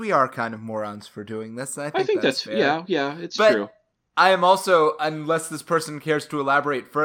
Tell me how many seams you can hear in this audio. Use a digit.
0